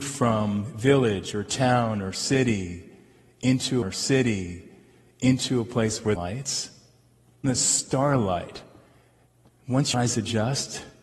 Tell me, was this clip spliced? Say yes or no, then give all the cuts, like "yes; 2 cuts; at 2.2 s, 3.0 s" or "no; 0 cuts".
yes; 4 cuts; at 3.8 s, 6.1 s, 7.4 s, 9.9 s